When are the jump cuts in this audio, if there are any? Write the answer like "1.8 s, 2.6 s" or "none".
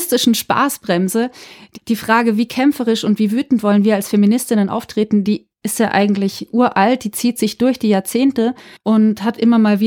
8.8 s